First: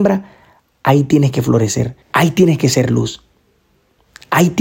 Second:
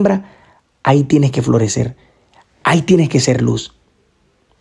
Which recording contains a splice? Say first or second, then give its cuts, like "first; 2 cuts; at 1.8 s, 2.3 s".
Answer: first; 1 cut; at 2.0 s